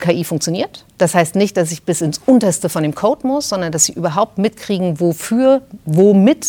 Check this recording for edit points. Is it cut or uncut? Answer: uncut